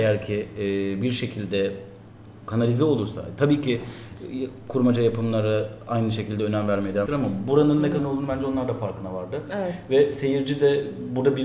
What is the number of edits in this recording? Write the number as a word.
two